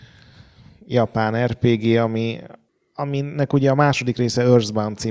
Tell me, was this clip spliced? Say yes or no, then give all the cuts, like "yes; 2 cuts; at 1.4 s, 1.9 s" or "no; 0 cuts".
no; 0 cuts